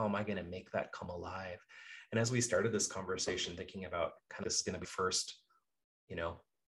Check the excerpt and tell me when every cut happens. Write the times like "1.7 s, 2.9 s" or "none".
4.4 s, 4.8 s